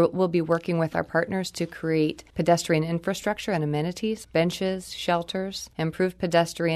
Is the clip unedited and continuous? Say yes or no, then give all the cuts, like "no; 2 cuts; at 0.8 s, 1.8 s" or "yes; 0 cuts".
no; 3 cuts; at 2.3 s, 4.2 s, 5.7 s